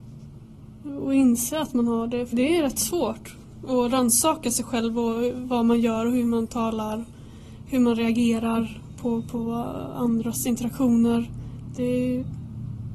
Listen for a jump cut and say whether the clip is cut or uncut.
cut